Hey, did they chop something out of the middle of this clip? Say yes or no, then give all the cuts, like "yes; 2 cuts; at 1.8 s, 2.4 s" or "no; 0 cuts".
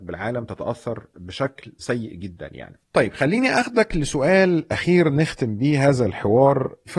yes; 1 cut; at 2.8 s